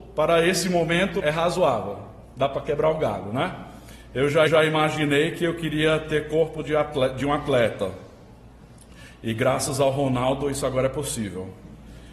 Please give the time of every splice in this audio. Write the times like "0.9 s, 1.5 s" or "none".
1.2 s, 4.5 s